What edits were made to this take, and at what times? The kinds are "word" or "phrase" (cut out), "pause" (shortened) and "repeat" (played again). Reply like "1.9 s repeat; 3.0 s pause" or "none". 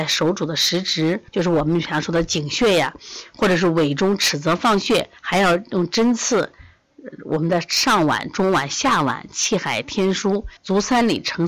1.3 s pause; 5.2 s pause; 10.6 s pause